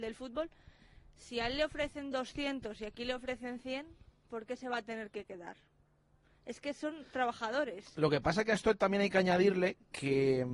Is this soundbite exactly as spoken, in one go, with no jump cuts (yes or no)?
yes